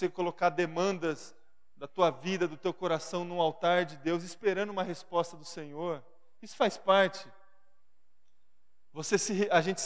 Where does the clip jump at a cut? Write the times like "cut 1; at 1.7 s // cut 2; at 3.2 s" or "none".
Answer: none